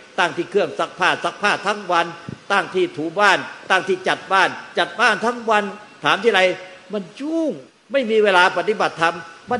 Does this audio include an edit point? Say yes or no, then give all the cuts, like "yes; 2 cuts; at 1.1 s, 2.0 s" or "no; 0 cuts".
yes; 1 cut; at 7.7 s